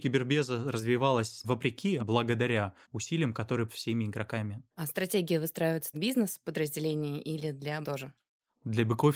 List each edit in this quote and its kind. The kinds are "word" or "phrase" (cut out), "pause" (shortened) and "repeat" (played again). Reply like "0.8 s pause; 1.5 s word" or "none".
1.4 s word; 2.0 s word; 2.8 s pause; 3.7 s word; 4.7 s pause; 5.9 s phrase; 7.8 s word